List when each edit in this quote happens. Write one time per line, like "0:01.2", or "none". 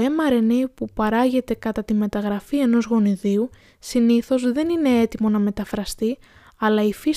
none